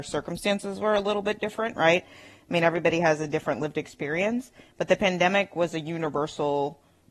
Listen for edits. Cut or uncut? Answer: uncut